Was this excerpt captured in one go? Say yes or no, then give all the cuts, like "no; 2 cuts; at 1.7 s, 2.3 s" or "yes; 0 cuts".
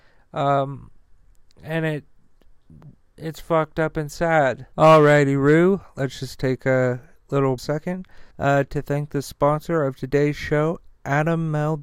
no; 3 cuts; at 4.7 s, 7.6 s, 8.3 s